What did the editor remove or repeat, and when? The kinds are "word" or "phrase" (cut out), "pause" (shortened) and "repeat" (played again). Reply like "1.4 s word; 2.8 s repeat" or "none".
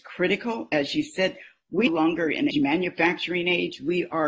1.9 s phrase; 2.5 s phrase